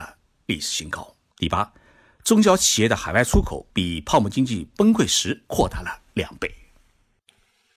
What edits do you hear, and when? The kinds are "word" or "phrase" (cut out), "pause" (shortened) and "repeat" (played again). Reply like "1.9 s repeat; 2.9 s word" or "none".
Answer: 1.3 s pause; 3.7 s pause; 5.4 s pause